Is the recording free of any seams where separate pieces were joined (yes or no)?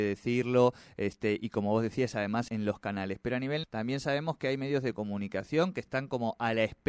no